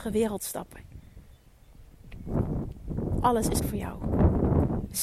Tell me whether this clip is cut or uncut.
cut